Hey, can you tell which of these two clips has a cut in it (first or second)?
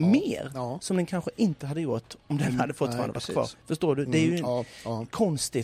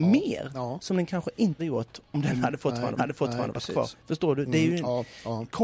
second